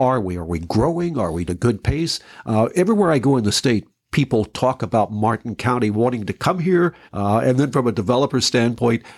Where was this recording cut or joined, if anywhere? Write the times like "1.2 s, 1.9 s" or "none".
1.5 s, 7.1 s

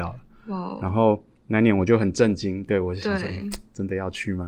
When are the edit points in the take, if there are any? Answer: none

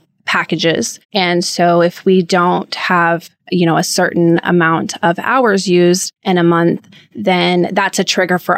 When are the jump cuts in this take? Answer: 1.0 s, 3.4 s, 6.2 s

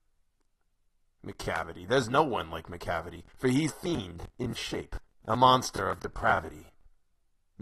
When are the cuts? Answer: 3.3 s, 3.7 s, 4.6 s, 5.1 s

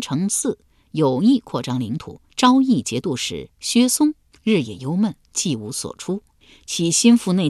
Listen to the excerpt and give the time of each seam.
2.3 s

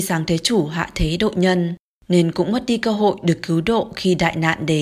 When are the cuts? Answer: none

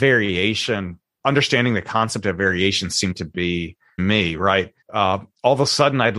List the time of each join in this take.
4.0 s, 4.8 s

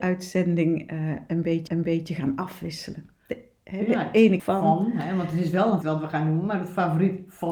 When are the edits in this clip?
1.7 s, 4.4 s, 5.8 s

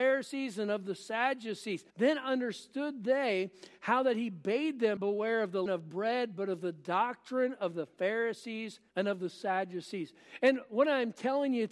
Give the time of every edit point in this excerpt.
1.9 s, 5.0 s, 5.7 s, 8.9 s

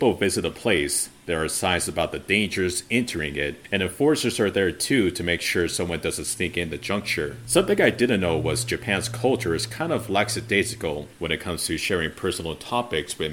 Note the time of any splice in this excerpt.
none

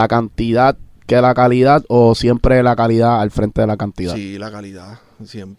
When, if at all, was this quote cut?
none

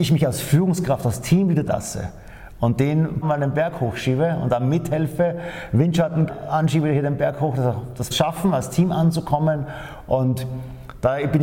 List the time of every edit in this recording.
1.7 s, 3.2 s, 6.3 s, 8.1 s

